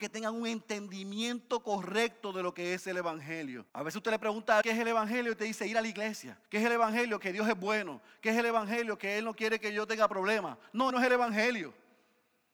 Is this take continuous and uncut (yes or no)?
no